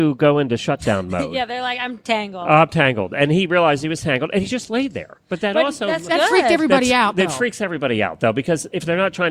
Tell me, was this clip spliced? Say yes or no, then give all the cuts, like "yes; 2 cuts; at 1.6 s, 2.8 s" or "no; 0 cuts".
no; 0 cuts